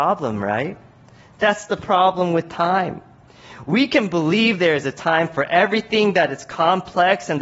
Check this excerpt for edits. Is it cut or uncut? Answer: uncut